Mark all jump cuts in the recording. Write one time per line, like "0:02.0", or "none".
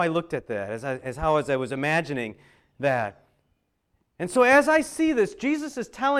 none